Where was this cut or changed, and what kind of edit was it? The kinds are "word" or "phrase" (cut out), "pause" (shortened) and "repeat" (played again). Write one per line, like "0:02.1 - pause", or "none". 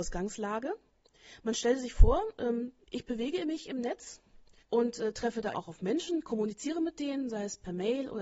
0:02.8 - pause
0:04.6 - pause
0:05.5 - word